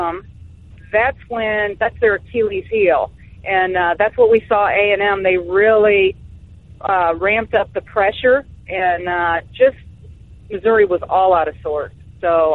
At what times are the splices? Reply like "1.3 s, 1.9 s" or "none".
none

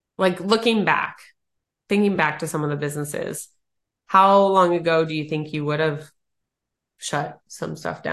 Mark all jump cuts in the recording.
none

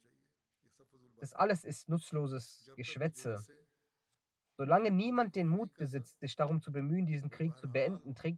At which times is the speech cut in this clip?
none

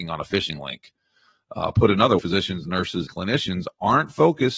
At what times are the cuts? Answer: 2.2 s, 3.1 s

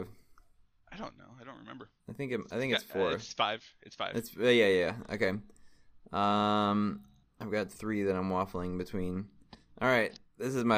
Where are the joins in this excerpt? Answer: 2.0 s, 7.2 s

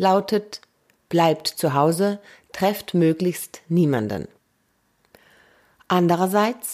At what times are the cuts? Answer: none

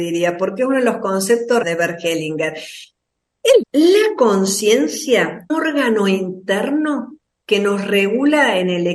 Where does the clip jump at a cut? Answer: 1.6 s, 3.6 s, 5.5 s

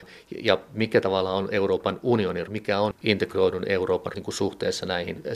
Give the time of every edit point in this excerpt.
2.5 s, 4.1 s

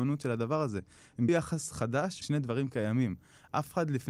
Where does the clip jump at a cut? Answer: 1.3 s, 2.2 s

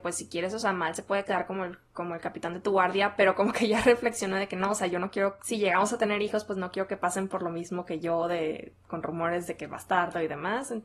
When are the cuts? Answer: none

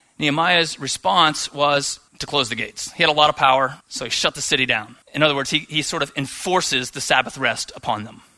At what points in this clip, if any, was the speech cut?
2.1 s, 3.8 s, 5.0 s

